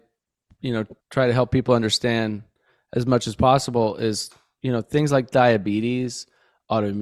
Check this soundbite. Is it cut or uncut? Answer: cut